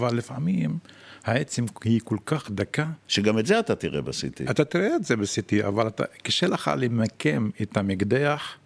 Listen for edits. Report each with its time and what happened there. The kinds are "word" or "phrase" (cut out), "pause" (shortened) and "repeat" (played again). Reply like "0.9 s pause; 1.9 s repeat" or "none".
3.0 s pause

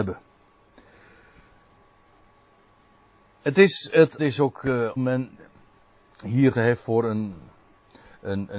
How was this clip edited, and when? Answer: 4.2 s phrase; 5.0 s phrase; 6.5 s word

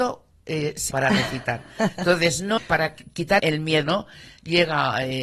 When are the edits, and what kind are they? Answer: 0.9 s word; 2.6 s phrase; 3.4 s word; 3.8 s word

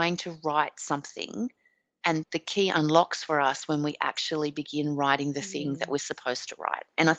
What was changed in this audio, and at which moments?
2.2 s word

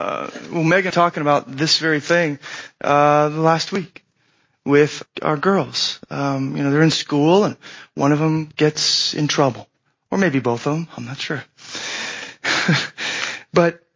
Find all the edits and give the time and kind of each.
0.9 s phrase; 5.0 s word

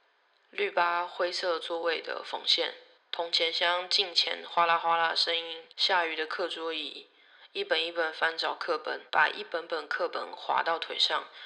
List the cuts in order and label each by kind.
3.0 s pause; 5.7 s pause; 9.1 s pause

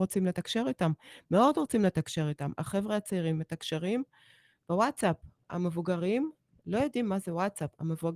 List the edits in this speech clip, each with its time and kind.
5.4 s pause

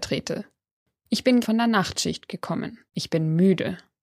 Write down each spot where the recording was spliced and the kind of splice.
1.4 s word; 2.9 s pause

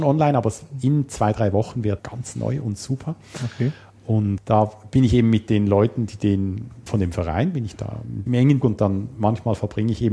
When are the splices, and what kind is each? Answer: 2.0 s word; 4.4 s word; 6.9 s word; 8.3 s word; 8.6 s word

